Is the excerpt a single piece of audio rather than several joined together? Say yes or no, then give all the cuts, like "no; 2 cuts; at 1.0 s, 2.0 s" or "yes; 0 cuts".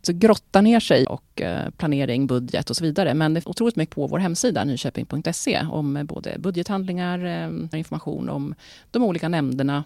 no; 4 cuts; at 1.0 s, 3.4 s, 3.9 s, 7.7 s